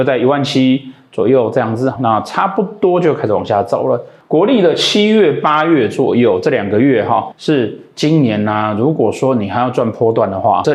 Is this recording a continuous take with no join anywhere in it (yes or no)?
no